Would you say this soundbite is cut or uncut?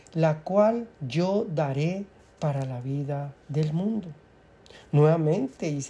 cut